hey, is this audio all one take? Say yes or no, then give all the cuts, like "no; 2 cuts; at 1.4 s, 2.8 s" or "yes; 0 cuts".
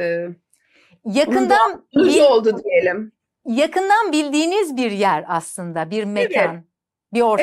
yes; 0 cuts